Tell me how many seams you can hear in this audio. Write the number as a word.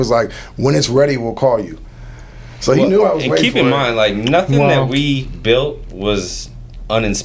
zero